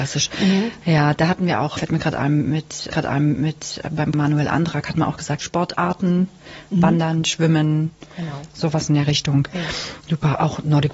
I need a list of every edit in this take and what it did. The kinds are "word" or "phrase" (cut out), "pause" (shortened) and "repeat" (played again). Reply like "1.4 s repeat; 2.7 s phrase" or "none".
1.8 s word; 2.9 s repeat; 4.1 s phrase; 5.4 s word